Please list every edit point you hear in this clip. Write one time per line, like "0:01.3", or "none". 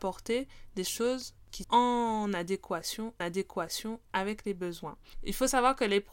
0:01.6
0:03.2